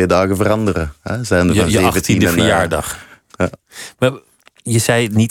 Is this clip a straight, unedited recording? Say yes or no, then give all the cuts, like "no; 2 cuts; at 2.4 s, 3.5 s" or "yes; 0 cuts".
yes; 0 cuts